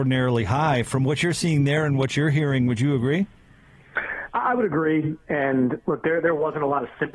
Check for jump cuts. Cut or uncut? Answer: uncut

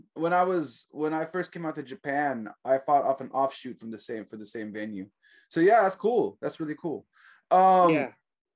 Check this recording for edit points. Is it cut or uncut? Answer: uncut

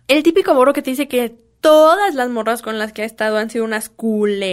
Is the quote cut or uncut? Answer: uncut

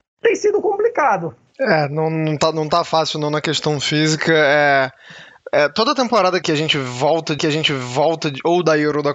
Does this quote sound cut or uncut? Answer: cut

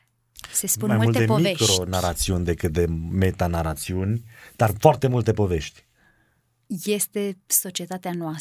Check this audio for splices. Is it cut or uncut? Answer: cut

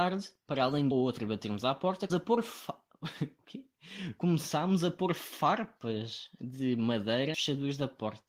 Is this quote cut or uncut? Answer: cut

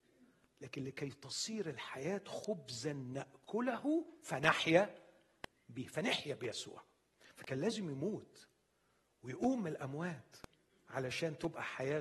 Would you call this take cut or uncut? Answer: uncut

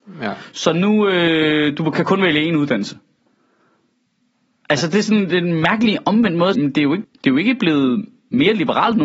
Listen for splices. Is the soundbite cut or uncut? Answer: cut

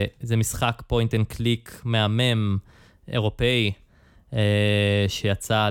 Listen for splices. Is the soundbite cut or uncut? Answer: uncut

